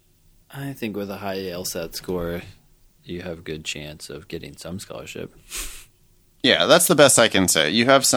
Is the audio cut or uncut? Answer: uncut